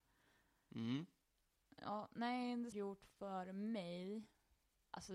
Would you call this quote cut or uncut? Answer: cut